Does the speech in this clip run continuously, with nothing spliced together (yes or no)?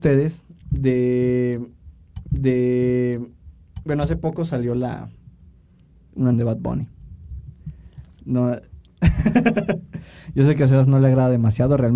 no